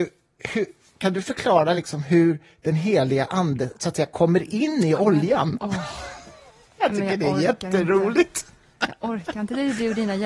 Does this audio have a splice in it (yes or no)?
no